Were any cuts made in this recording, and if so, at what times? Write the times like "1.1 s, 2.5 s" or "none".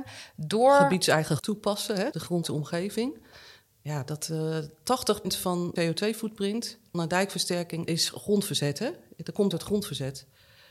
1.4 s, 2.1 s, 2.4 s, 5.2 s, 5.8 s, 6.9 s, 7.9 s, 9.5 s